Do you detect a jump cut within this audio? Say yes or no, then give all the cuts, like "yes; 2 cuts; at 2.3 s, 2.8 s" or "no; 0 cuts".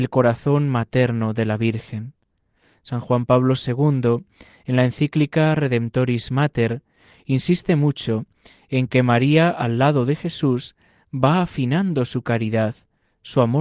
no; 0 cuts